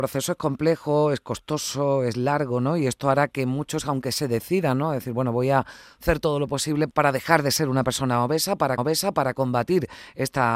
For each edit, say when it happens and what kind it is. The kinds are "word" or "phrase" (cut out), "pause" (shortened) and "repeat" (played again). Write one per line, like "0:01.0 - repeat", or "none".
0:06.9 - word
0:08.8 - repeat